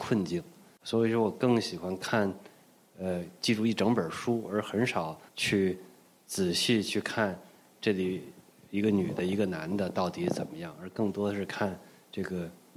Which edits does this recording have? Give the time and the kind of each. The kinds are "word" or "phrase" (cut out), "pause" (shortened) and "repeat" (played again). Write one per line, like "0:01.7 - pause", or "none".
0:05.3 - pause